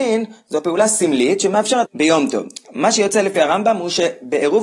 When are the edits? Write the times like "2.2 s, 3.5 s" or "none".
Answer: 1.9 s